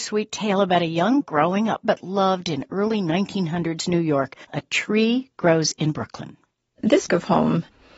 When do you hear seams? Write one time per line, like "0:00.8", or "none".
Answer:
0:01.2
0:01.8
0:04.4
0:07.1

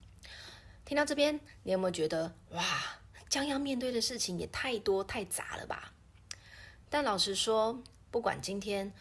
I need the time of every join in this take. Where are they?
0:06.8

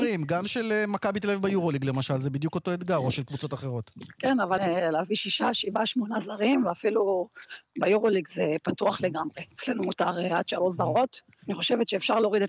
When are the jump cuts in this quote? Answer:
0:04.6

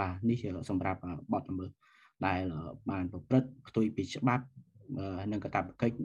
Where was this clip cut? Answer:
none

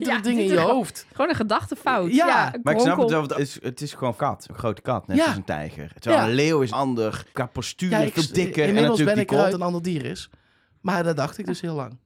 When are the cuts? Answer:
0:03.3
0:04.2
0:06.7
0:07.3
0:09.5

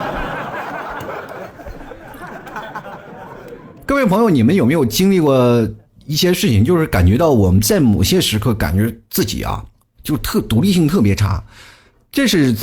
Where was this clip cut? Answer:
none

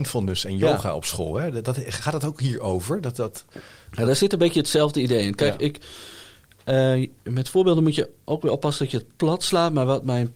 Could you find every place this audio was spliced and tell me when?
none

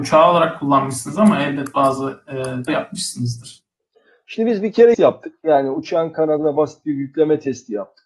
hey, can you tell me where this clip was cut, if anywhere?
0:02.7
0:04.9

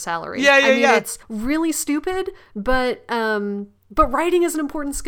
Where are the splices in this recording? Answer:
0:01.2

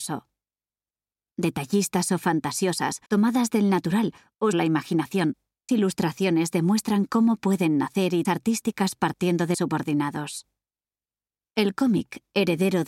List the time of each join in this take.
0:03.1
0:04.5
0:05.7
0:08.2
0:09.5

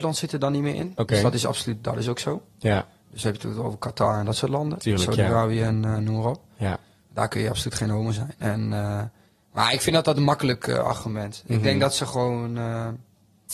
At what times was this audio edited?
none

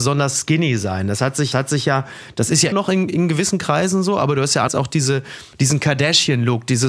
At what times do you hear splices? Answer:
0:01.5
0:02.7
0:04.7
0:05.5

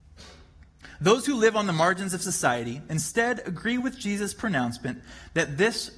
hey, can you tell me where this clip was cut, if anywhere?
none

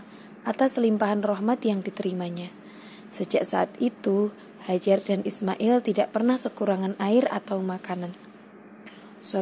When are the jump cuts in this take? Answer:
none

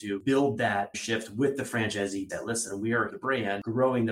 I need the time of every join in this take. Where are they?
0:00.9
0:02.3
0:03.1

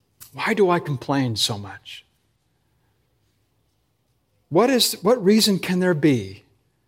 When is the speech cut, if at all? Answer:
none

